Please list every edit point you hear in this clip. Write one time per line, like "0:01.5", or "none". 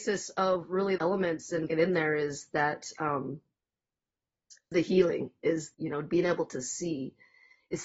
0:01.0
0:01.7
0:04.7
0:05.7